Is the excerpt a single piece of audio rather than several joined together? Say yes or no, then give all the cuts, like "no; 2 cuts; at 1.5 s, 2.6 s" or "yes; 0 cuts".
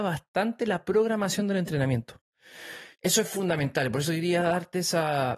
no; 1 cut; at 2.9 s